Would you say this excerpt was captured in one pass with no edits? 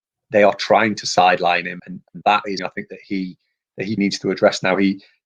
no; 3 cuts; at 1.8 s, 2.6 s, 4.0 s

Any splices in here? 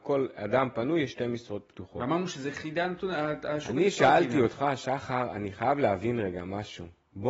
no; 0 cuts

